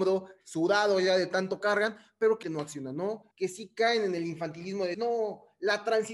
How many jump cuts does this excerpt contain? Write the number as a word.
four